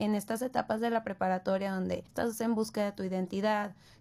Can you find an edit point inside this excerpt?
yes; 1 cut; at 2.1 s

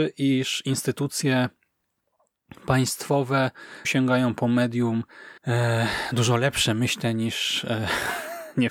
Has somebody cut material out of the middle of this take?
yes; 2 cuts; at 3.8 s, 5.4 s

